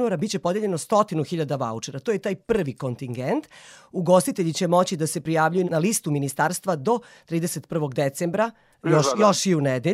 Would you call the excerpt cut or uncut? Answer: uncut